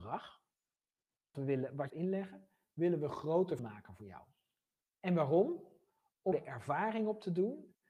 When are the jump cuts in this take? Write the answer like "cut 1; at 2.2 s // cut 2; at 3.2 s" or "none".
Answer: cut 1; at 1.3 s // cut 2; at 1.9 s // cut 3; at 3.6 s // cut 4; at 6.3 s